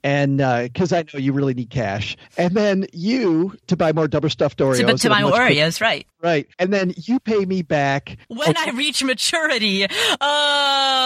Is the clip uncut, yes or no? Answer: no